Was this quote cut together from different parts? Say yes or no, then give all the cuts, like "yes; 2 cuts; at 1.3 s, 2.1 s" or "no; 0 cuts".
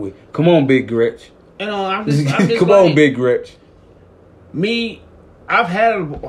no; 0 cuts